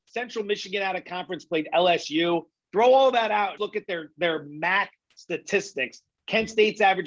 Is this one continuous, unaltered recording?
no; 1 cut; at 3.6 s

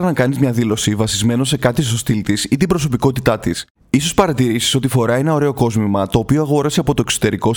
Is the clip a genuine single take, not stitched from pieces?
yes; 0 cuts

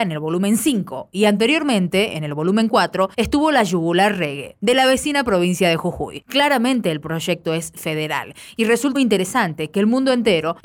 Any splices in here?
yes; 2 cuts; at 3.1 s, 8.9 s

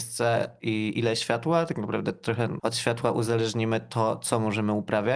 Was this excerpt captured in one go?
yes; 0 cuts

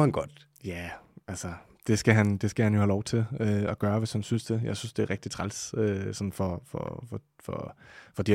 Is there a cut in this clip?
no; 0 cuts

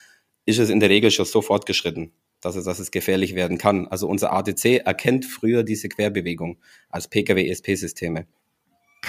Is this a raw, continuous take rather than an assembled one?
yes; 0 cuts

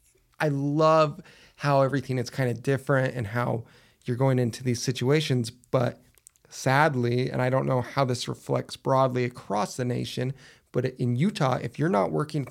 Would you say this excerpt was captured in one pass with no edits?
yes; 0 cuts

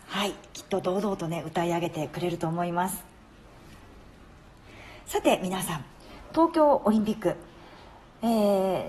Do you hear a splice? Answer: no; 0 cuts

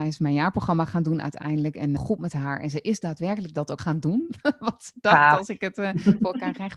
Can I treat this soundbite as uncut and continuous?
no; 2 cuts; at 2.0 s, 3.8 s

